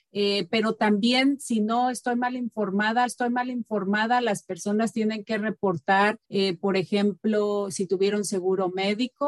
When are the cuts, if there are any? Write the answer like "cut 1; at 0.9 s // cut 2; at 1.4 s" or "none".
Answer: cut 1; at 3.1 s // cut 2; at 6.2 s